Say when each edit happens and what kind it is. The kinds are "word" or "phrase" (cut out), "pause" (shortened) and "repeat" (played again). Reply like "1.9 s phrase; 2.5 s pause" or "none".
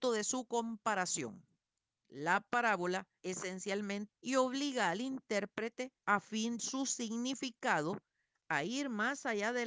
1.7 s pause; 3.2 s word; 4.1 s phrase; 6.0 s pause; 6.6 s word